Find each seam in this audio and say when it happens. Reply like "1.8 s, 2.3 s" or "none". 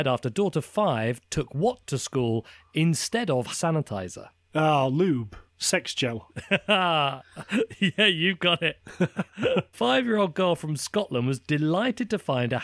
3.5 s, 5.5 s, 9.7 s